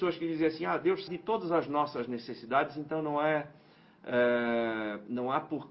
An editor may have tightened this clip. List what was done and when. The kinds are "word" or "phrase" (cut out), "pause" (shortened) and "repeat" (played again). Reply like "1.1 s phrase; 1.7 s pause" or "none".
1.1 s phrase